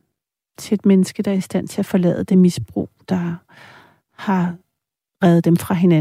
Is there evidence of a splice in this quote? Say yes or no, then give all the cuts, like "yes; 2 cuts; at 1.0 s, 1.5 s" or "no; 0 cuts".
no; 0 cuts